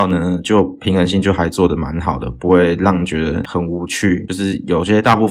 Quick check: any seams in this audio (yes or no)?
yes